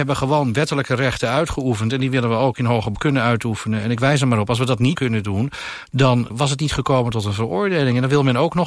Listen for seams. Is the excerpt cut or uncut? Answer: cut